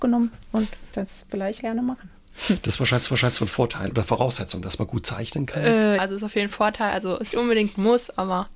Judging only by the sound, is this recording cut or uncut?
cut